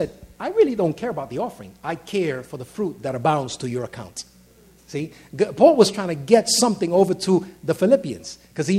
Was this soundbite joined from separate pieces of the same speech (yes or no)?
no